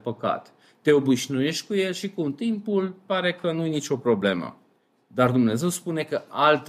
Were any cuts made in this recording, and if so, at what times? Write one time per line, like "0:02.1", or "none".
none